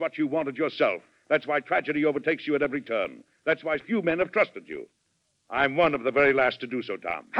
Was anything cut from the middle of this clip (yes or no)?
yes